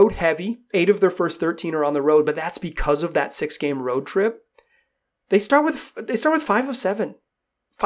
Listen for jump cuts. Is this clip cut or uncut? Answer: uncut